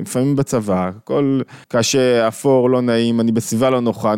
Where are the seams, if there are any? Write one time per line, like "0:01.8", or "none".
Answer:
0:01.6